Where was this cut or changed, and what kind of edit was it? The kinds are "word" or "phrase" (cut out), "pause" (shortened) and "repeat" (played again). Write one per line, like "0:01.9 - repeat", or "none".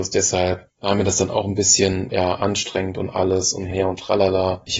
0:02.1 - word
0:03.7 - word